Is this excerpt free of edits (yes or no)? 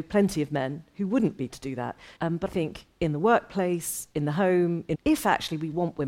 no